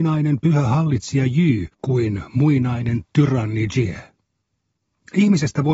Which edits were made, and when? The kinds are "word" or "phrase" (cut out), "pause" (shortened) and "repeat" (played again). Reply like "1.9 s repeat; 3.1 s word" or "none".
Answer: 1.7 s pause